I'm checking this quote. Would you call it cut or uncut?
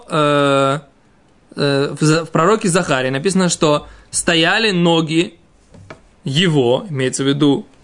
uncut